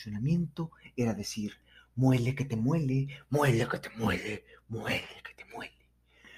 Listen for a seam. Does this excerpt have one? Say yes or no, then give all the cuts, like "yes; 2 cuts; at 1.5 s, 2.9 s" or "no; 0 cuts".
no; 0 cuts